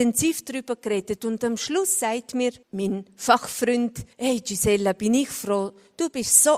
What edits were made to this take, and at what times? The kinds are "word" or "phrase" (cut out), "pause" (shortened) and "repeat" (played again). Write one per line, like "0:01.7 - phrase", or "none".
0:02.6 - pause
0:04.1 - pause